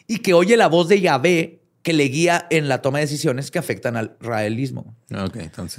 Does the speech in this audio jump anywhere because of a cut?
no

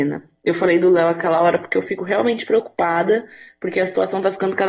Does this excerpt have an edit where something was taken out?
no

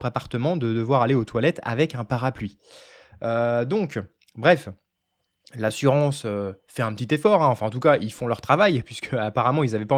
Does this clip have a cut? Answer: no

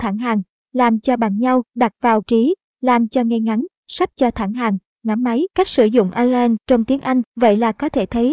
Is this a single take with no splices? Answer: no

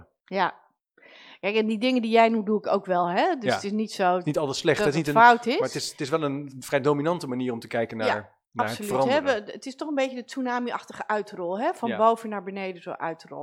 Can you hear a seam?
no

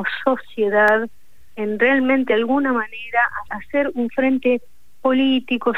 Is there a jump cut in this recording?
yes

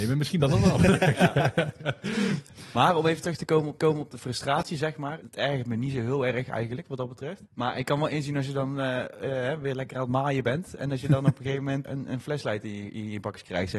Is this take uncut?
no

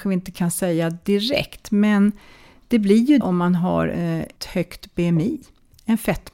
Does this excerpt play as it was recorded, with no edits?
no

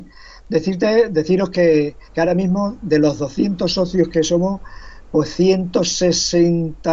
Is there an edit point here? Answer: yes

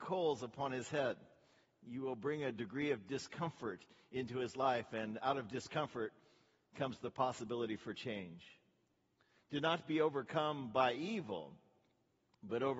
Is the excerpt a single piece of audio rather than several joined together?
yes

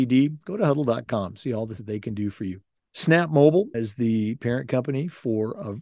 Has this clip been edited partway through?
yes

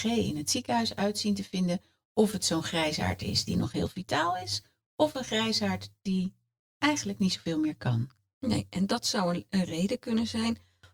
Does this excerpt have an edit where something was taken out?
no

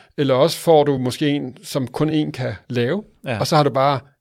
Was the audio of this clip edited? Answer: no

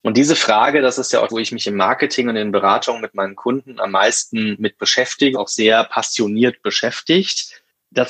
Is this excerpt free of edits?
no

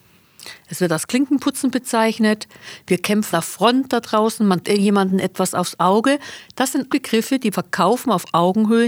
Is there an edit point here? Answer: yes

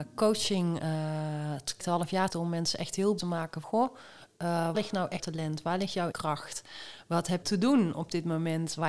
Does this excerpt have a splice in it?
yes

